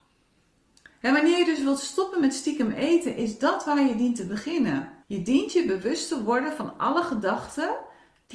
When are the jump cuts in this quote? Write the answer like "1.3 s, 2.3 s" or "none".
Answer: 5.0 s